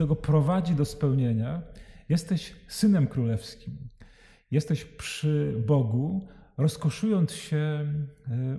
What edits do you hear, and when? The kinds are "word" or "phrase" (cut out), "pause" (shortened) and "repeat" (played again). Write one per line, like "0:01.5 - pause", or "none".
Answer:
none